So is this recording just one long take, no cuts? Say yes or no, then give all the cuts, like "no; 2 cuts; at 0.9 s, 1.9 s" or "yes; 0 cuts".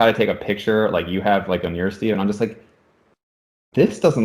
yes; 0 cuts